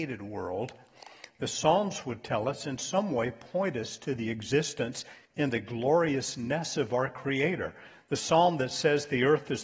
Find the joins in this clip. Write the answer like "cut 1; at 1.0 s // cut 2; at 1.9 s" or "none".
cut 1; at 5.3 s